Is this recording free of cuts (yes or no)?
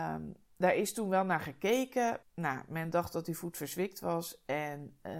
no